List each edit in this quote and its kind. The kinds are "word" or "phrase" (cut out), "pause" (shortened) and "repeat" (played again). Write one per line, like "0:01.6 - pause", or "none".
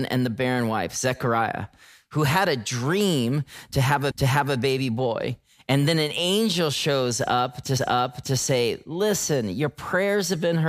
0:04.1 - repeat
0:07.8 - repeat